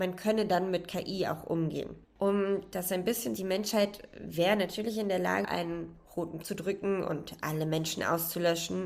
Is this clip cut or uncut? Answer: cut